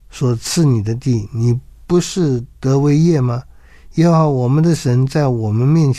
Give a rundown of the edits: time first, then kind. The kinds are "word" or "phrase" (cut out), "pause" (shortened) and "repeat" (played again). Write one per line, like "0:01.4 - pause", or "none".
0:01.7 - pause
0:02.5 - pause